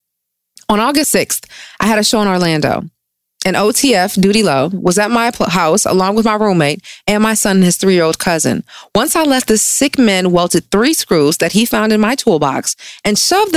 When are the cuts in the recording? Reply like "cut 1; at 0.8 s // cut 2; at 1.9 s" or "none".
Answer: none